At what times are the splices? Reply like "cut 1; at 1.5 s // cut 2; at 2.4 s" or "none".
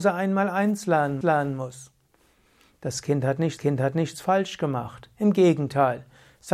cut 1; at 1.2 s // cut 2; at 3.6 s